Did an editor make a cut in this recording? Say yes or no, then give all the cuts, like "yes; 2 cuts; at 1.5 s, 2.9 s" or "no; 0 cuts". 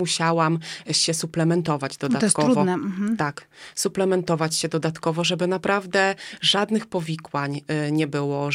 no; 0 cuts